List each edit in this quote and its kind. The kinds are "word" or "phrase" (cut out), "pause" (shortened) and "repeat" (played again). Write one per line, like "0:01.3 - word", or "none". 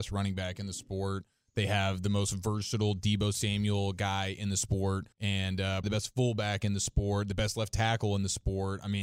0:05.1 - pause
0:05.8 - word